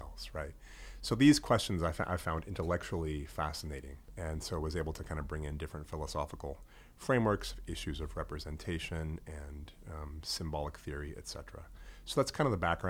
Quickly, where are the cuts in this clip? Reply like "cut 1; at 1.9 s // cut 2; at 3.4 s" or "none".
none